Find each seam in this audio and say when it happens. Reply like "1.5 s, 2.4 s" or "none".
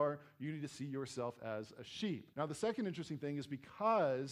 2.3 s